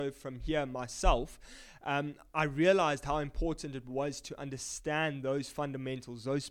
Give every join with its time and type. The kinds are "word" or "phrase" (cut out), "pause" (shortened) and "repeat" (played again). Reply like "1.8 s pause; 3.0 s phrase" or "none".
none